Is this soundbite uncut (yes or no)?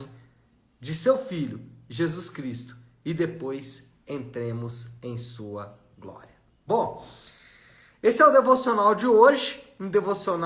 yes